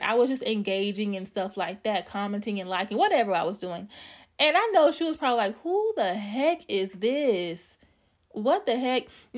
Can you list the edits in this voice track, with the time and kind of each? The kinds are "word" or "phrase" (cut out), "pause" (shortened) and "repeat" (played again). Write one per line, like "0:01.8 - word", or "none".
none